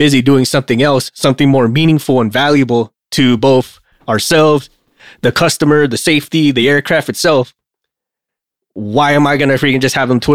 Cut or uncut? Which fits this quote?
uncut